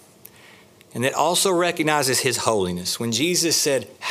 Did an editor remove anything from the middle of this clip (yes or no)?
no